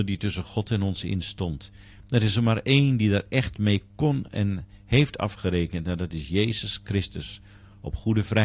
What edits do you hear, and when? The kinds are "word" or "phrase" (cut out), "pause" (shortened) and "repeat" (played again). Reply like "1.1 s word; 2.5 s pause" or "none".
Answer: none